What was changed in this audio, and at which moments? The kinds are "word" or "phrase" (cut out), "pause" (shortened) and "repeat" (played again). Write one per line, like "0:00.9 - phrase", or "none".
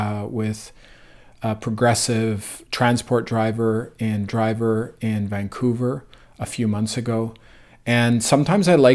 0:02.7 - word
0:04.3 - repeat